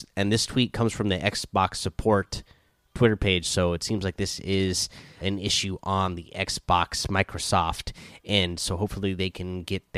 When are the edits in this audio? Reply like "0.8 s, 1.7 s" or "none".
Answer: 5.2 s